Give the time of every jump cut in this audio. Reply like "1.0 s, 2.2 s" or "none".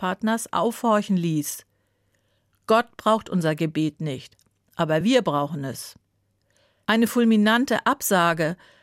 none